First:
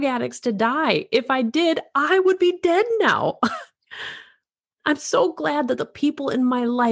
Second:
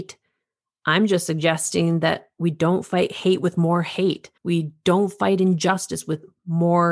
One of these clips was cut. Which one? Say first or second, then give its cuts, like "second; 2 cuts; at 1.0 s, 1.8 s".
second; 1 cut; at 4.4 s